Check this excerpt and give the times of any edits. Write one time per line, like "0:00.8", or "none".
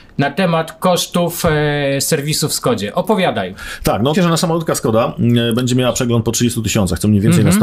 0:04.1